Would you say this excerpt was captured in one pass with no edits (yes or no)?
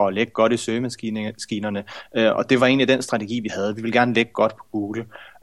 yes